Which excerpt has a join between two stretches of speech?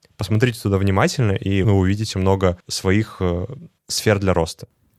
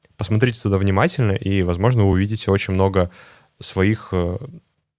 first; 4 cuts; at 1.6 s, 2.1 s, 2.6 s, 3.8 s

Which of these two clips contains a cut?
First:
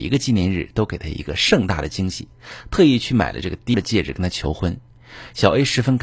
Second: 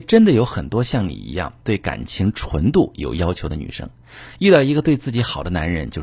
first; 1 cut; at 3.7 s

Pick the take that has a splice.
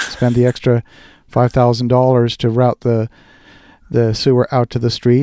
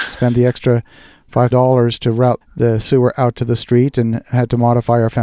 second; 2 cuts; at 1.5 s, 2.4 s

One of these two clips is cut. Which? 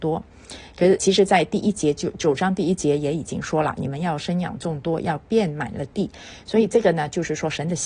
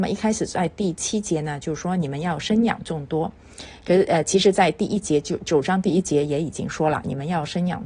first; 1 cut; at 1.0 s

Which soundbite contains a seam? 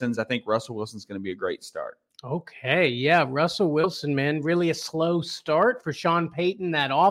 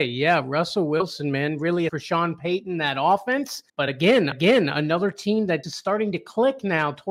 second; 4 cuts; at 1.9 s, 3.7 s, 4.3 s, 5.6 s

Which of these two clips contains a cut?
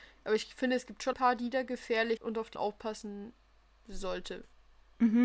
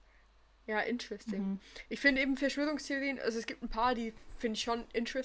first; 3 cuts; at 1.1 s, 2.2 s, 2.6 s

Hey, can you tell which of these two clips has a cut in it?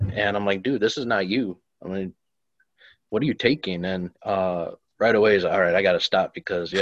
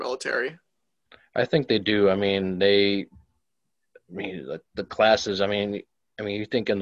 first; 1 cut; at 4.2 s

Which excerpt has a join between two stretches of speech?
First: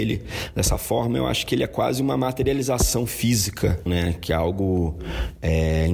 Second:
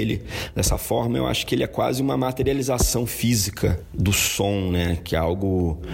first; 1 cut; at 3.9 s

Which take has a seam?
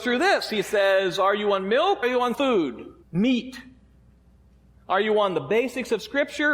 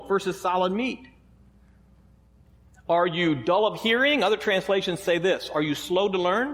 first; 3 cuts; at 2.0 s, 2.3 s, 3.0 s

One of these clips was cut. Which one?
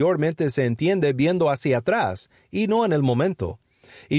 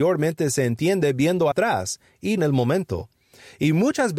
second; 2 cuts; at 1.5 s, 2.4 s

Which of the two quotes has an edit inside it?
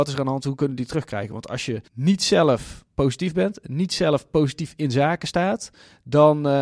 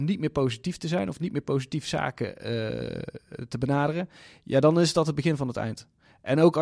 first; 1 cut; at 1.9 s

